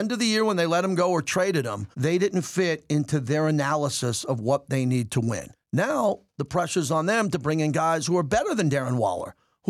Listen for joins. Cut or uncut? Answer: cut